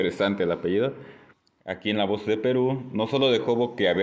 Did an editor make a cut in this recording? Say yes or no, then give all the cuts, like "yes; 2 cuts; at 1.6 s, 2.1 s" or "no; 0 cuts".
yes; 1 cut; at 1.3 s